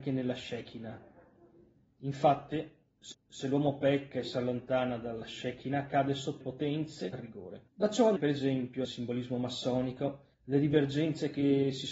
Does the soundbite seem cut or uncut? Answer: cut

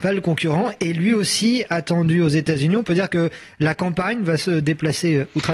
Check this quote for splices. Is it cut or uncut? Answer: uncut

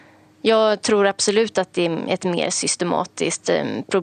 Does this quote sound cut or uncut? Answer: uncut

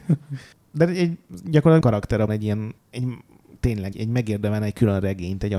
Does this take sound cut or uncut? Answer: cut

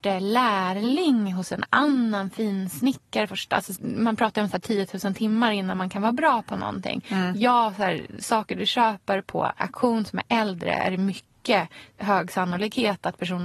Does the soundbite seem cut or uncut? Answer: cut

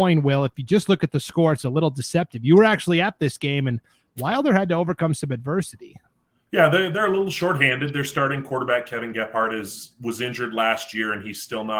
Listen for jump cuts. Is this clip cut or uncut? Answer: uncut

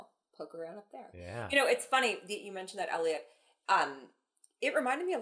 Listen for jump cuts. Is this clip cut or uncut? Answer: uncut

